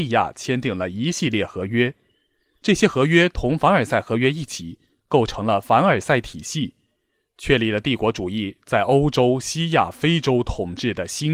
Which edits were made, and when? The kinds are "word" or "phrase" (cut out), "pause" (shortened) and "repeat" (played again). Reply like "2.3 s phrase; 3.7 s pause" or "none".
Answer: none